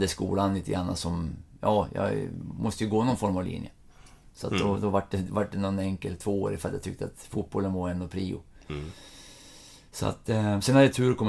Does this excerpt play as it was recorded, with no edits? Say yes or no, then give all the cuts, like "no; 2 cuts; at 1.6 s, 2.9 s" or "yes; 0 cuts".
yes; 0 cuts